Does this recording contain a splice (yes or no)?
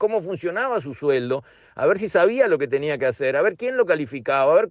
no